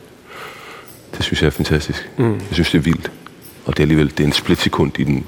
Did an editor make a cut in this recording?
yes; 1 cut; at 3.6 s

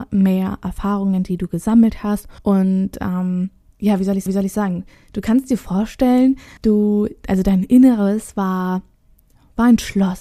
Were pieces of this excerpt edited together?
yes; 3 cuts; at 2.4 s, 4.3 s, 6.6 s

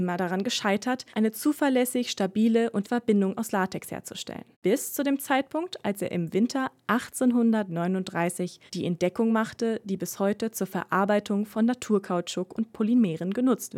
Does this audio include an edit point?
yes; 4 cuts; at 1.1 s, 2.8 s, 4.5 s, 8.7 s

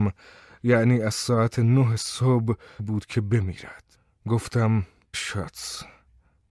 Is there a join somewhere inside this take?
yes; 2 cuts; at 2.8 s, 5.1 s

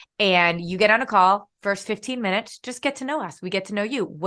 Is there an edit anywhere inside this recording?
no; 0 cuts

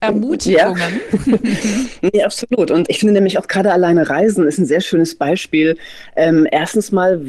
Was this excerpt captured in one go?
no; 1 cut; at 2.9 s

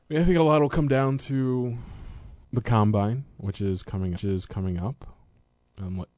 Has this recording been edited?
yes; 2 cuts; at 2.4 s, 4.2 s

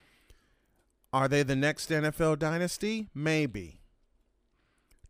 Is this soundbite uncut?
yes; 0 cuts

